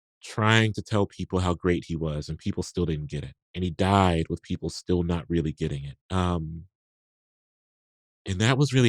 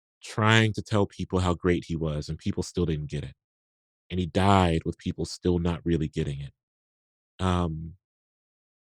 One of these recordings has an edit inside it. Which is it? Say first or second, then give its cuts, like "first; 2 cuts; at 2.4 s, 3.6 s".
first; 2 cuts; at 3.4 s, 6.0 s